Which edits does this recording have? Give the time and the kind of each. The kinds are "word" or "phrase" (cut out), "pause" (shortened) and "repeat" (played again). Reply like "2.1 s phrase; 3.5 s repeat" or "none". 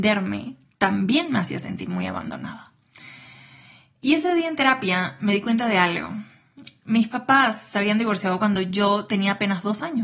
none